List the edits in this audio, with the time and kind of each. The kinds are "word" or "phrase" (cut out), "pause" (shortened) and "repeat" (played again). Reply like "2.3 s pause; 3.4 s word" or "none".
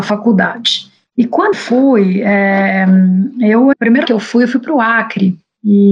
1.5 s word; 3.7 s word; 4.0 s word

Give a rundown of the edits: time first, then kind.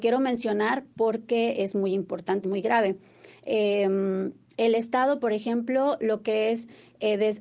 2.4 s phrase

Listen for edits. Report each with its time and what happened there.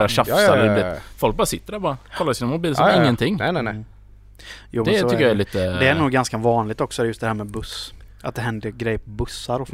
none

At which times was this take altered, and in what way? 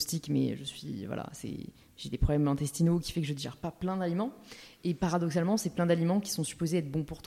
none

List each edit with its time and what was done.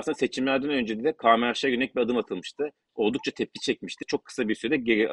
4.0 s word

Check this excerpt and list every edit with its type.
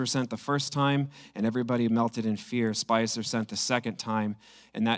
none

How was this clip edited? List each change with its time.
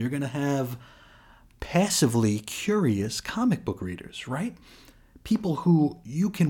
none

